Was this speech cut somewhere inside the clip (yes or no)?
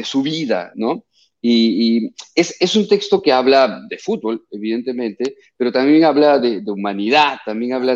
no